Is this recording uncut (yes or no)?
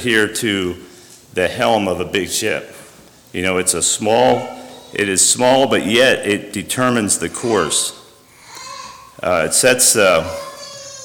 yes